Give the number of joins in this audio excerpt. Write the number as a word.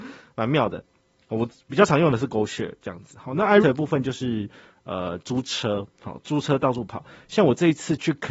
one